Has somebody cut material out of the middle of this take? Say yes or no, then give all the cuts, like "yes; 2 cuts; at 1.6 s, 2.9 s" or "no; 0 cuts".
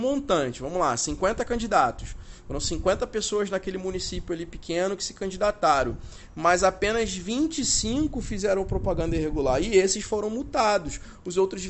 no; 0 cuts